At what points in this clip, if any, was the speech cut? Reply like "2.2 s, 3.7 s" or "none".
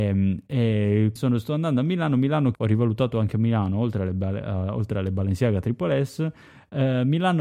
1.2 s, 2.5 s